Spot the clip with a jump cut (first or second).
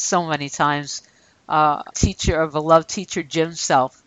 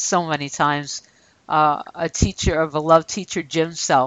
first